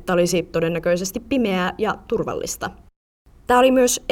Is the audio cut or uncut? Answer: uncut